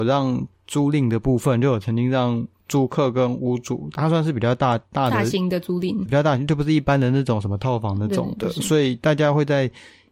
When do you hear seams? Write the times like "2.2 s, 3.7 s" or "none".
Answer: 6.1 s